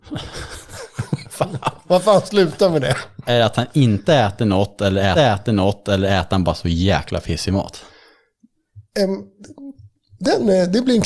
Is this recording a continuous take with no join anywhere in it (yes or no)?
no